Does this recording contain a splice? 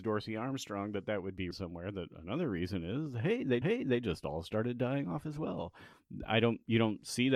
yes; 2 cuts; at 1.5 s, 3.6 s

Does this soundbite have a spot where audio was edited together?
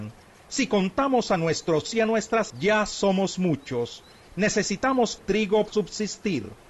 yes; 4 cuts; at 1.9 s, 2.5 s, 5.2 s, 5.7 s

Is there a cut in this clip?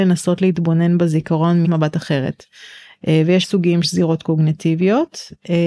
yes; 3 cuts; at 1.6 s, 3.4 s, 3.8 s

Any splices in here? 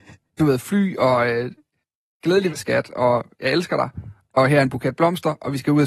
yes; 1 cut; at 2.5 s

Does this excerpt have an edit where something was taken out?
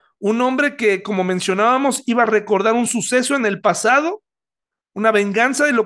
no; 0 cuts

